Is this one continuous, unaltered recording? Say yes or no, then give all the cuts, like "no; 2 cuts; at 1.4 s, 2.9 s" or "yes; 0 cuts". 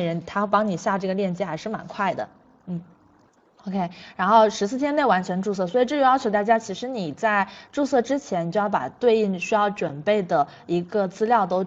yes; 0 cuts